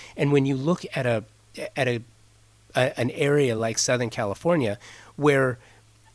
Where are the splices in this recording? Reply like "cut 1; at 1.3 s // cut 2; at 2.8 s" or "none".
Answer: none